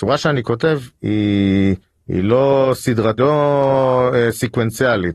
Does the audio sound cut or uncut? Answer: cut